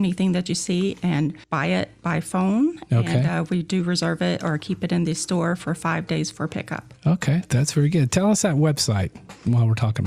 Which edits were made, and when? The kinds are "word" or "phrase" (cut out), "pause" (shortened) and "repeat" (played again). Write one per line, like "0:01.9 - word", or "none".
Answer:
0:01.4 - pause